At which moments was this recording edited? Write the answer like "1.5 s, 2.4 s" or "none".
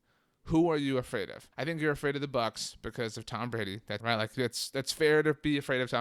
1.5 s, 4.0 s